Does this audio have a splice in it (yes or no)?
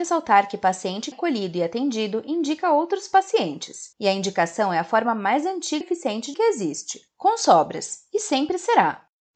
yes